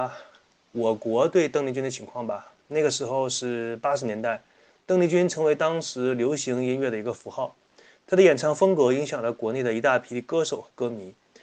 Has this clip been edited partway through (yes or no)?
no